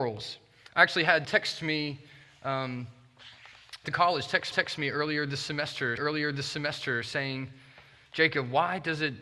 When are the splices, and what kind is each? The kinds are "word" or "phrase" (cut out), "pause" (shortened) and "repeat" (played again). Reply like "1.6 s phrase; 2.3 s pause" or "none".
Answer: 1.2 s word; 3.8 s phrase; 4.5 s repeat; 6.0 s repeat